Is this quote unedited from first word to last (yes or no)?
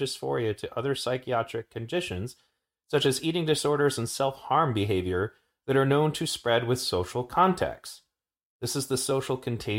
yes